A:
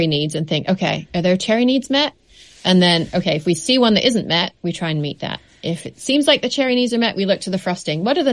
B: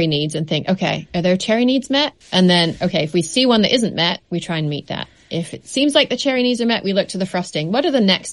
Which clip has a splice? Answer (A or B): B